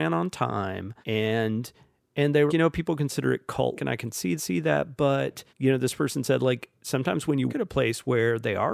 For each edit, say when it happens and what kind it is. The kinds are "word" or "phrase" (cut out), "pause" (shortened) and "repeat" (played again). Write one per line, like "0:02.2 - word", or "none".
0:01.0 - pause
0:02.5 - word
0:03.8 - word
0:04.4 - repeat
0:05.5 - pause
0:07.5 - word

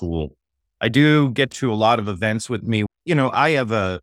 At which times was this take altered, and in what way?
0:01.5 - phrase
0:02.9 - word

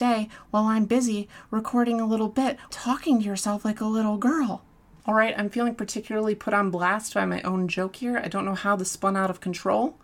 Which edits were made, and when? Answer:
none

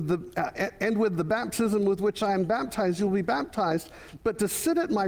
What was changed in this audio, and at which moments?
none

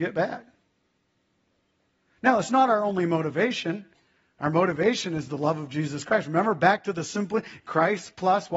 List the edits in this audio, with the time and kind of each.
none

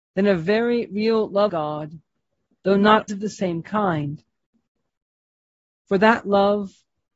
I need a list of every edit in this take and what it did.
0:01.5 - word
0:03.1 - word

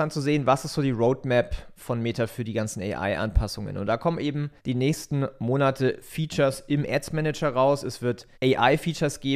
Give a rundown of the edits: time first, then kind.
0:04.6 - pause
0:08.3 - pause

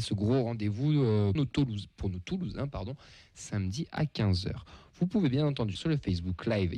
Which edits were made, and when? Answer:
0:01.4 - word
0:05.8 - word

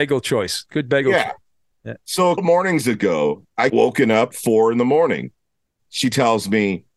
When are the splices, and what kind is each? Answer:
0:02.4 - word
0:03.7 - word
0:04.3 - word

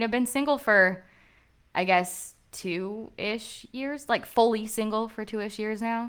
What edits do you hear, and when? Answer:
none

